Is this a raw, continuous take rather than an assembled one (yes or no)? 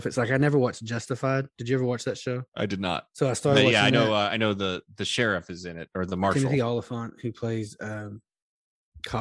no